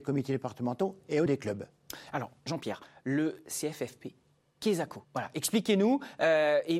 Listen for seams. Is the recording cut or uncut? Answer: cut